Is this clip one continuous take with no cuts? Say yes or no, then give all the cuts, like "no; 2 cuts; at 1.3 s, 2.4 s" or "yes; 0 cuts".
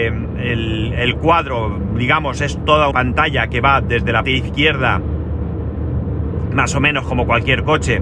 no; 2 cuts; at 2.9 s, 4.2 s